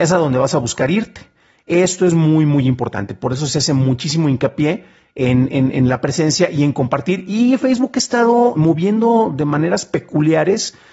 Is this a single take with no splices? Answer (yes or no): no